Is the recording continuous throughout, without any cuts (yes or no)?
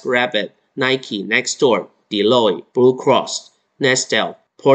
no